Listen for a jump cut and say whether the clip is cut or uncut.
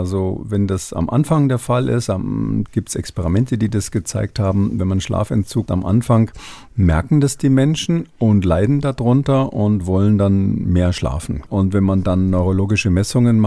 cut